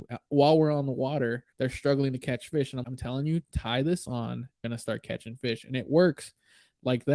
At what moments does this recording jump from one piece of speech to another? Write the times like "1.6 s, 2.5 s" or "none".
1.5 s, 2.8 s, 4.6 s